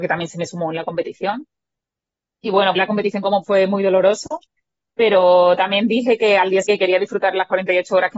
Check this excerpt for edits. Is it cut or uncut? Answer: cut